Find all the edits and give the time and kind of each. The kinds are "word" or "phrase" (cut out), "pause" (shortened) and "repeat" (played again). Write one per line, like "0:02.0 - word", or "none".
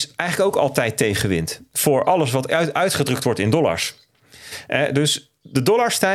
none

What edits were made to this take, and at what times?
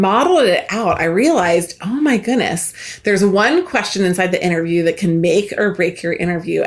none

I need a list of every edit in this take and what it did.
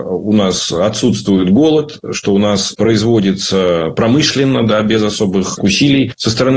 0:02.7 - word

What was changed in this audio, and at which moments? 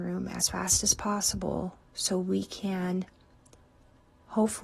0:01.9 - pause

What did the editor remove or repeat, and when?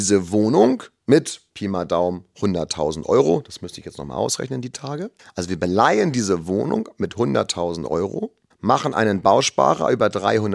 0:01.5 - pause
0:05.2 - pause
0:08.5 - pause

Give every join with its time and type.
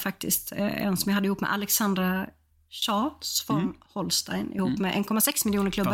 none

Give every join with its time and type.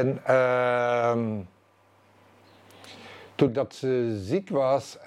0:03.5 - word

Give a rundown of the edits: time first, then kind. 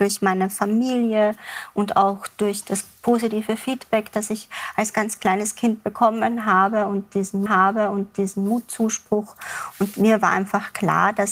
0:07.5 - repeat

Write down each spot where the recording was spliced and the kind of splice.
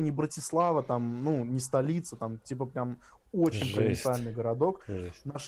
none

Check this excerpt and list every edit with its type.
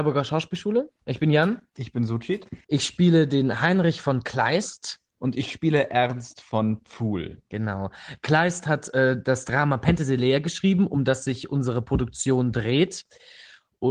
0:02.6 - pause
0:05.1 - pause

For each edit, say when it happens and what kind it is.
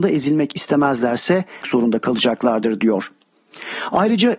0:01.6 - phrase

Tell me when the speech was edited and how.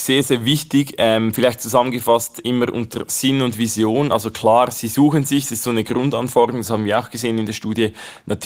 none

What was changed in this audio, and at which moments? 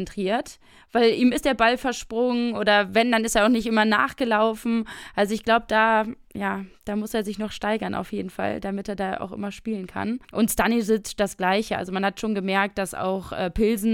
0:10.2 - pause

